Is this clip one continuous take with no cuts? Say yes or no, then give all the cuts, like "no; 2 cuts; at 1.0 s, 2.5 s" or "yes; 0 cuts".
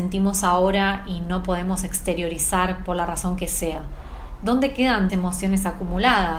no; 1 cut; at 5.1 s